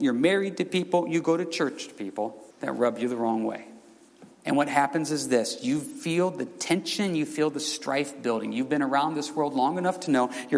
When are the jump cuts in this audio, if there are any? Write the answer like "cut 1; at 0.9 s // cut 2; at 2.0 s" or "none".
cut 1; at 2.5 s // cut 2; at 4.3 s